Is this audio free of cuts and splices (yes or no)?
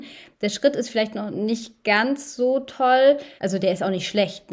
no